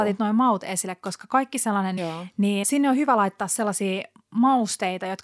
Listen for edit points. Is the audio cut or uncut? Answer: cut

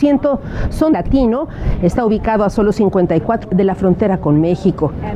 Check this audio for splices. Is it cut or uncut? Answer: cut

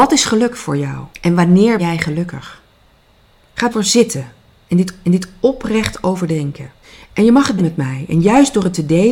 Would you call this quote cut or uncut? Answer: cut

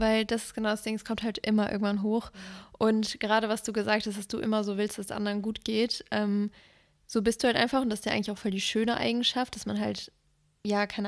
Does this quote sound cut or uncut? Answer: uncut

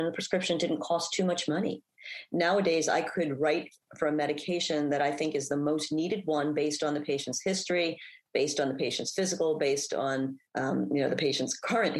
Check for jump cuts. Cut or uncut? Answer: cut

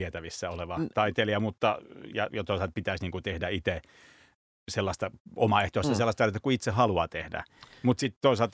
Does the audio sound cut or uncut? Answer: uncut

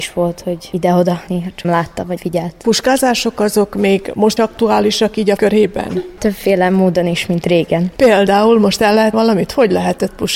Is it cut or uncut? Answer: cut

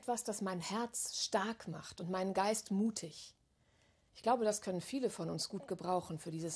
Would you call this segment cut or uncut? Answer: uncut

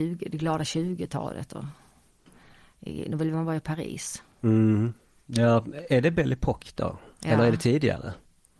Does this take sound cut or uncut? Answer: uncut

